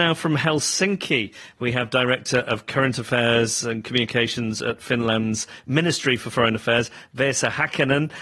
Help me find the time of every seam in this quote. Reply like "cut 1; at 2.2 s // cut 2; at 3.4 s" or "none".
none